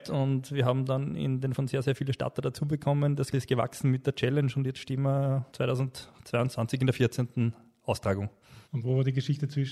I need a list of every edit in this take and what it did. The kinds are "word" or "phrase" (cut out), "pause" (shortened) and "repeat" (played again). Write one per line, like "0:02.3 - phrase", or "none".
0:01.6 - word
0:03.3 - word
0:05.5 - pause
0:08.6 - pause